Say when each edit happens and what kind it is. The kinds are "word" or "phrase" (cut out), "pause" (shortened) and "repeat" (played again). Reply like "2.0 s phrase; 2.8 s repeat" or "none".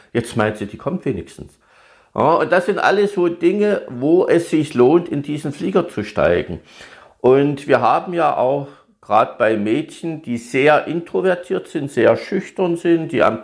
none